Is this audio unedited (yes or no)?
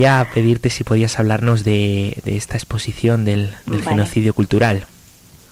yes